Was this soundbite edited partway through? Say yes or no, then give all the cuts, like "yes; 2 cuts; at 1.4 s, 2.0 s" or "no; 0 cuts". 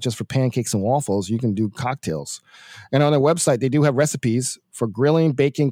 no; 0 cuts